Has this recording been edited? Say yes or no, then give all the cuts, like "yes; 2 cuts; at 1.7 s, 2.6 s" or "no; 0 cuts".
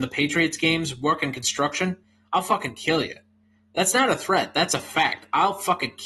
no; 0 cuts